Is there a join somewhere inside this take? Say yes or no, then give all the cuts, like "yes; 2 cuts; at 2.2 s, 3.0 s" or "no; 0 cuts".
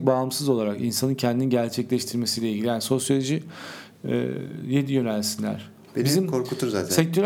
no; 0 cuts